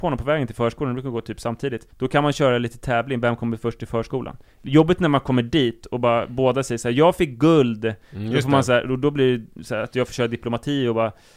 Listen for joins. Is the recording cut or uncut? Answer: cut